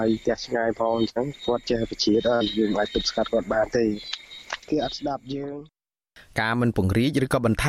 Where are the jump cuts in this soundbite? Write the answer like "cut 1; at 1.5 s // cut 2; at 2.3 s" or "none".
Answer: cut 1; at 4.6 s